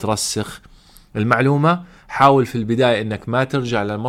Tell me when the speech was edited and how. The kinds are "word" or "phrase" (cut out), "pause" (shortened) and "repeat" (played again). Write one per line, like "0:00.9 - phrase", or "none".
none